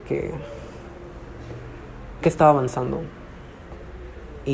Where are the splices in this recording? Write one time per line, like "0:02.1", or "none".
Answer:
0:02.2